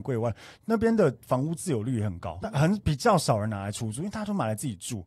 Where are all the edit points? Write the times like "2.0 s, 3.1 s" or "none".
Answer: 2.4 s